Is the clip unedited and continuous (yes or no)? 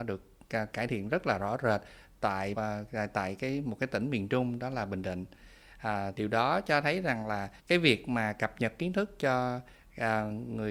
no